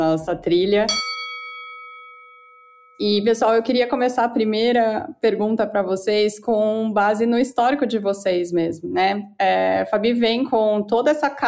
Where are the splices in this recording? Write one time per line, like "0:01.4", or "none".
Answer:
none